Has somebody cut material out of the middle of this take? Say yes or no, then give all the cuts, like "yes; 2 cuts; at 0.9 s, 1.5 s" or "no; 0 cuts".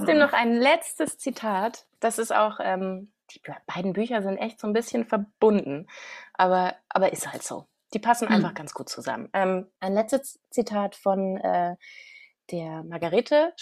yes; 3 cuts; at 1.9 s, 3.2 s, 9.7 s